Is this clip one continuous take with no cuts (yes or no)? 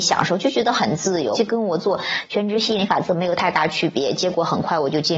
no